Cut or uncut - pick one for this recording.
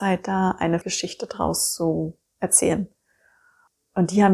uncut